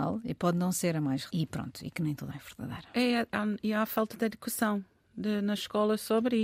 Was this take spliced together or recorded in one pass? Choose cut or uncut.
cut